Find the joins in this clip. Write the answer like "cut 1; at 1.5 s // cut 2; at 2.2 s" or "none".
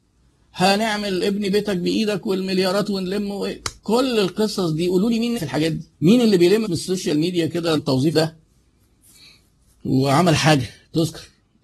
cut 1; at 3.8 s // cut 2; at 5.4 s // cut 3; at 5.9 s // cut 4; at 6.6 s // cut 5; at 7.8 s // cut 6; at 8.1 s